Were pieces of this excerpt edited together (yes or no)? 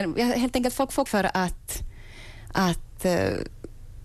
yes